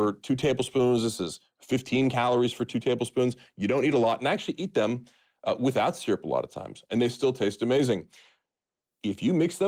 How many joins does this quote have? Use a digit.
0